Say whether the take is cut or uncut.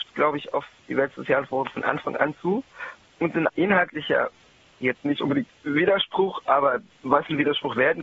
cut